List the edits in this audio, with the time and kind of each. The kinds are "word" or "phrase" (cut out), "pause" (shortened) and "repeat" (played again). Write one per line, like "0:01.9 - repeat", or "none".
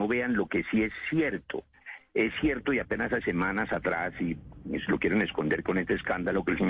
0:03.2 - word